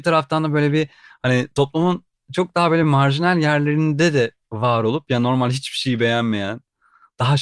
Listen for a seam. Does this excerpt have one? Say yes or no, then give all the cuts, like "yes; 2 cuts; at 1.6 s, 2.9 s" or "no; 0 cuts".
no; 0 cuts